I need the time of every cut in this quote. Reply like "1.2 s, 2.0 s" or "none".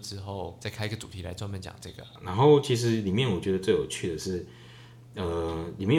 none